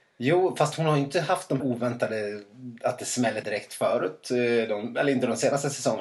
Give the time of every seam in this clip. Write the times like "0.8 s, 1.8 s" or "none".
1.6 s, 3.4 s